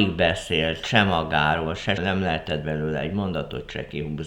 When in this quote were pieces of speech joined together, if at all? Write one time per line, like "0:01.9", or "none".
0:02.0